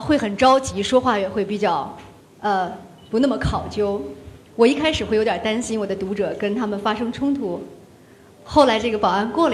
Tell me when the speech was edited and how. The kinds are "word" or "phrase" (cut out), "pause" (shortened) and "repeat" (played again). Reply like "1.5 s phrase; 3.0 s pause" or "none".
2.2 s pause; 4.5 s pause